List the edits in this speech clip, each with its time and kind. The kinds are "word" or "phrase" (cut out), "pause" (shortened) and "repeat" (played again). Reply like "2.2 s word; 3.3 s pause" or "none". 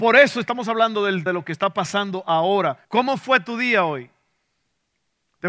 1.3 s word; 2.8 s pause